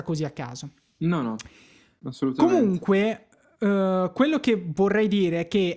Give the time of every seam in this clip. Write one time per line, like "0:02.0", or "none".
none